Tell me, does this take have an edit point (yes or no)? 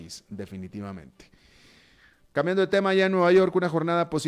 no